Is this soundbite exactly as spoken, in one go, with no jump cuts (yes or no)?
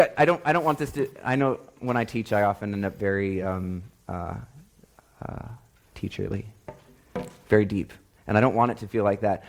yes